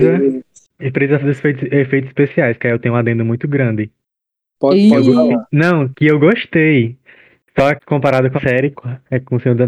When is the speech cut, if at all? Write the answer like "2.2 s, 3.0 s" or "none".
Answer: 1.2 s, 5.9 s, 7.8 s, 8.4 s, 8.7 s